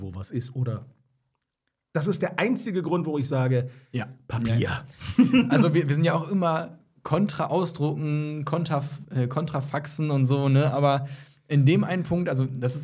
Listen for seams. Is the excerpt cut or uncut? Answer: uncut